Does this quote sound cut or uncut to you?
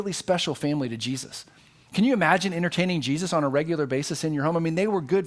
uncut